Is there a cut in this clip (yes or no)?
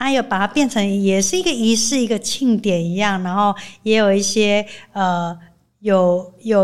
no